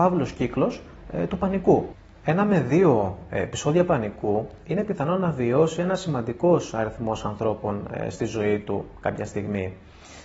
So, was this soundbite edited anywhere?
no; 0 cuts

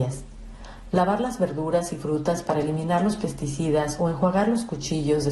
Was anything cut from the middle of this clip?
no; 0 cuts

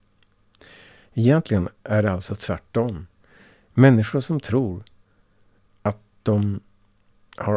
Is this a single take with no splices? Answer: yes; 0 cuts

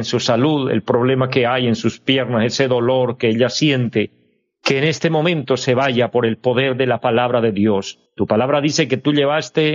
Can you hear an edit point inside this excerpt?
yes; 1 cut; at 8.1 s

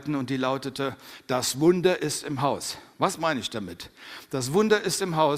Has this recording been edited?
no; 0 cuts

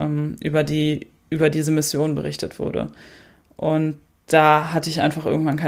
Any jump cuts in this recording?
no; 0 cuts

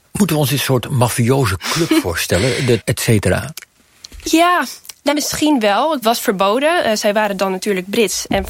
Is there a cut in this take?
yes; 3 cuts; at 2.8 s, 5.1 s, 6.0 s

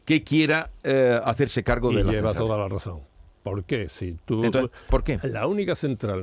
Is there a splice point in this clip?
no; 0 cuts

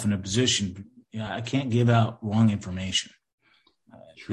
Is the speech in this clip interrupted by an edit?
no; 0 cuts

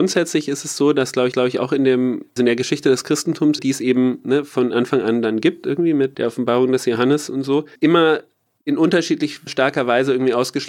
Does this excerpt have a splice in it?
yes; 4 cuts; at 1.3 s, 2.4 s, 3.6 s, 7.7 s

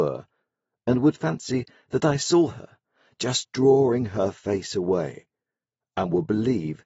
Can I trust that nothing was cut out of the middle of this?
yes; 0 cuts

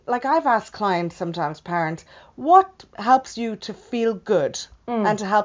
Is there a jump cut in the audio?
no; 0 cuts

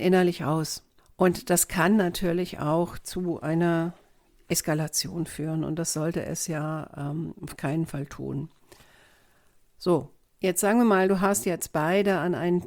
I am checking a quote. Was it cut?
no; 0 cuts

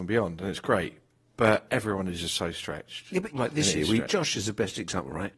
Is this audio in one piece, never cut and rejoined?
yes; 0 cuts

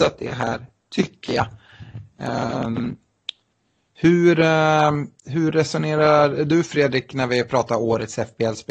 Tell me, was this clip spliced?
no; 0 cuts

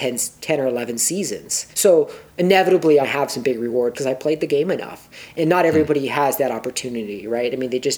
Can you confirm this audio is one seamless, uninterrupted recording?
no; 3 cuts; at 1.7 s, 3.0 s, 3.9 s

